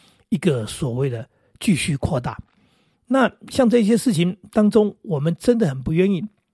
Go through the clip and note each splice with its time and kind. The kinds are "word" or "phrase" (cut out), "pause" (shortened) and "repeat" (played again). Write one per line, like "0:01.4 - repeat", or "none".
none